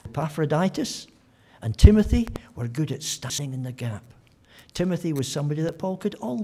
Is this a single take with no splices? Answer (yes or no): yes